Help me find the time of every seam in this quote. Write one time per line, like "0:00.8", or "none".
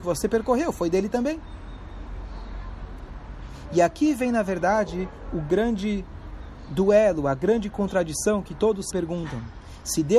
0:08.9